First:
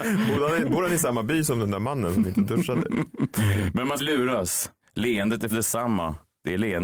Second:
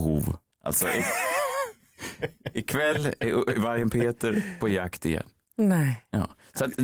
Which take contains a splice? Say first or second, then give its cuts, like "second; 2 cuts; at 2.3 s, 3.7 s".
first; 2 cuts; at 4.0 s, 5.5 s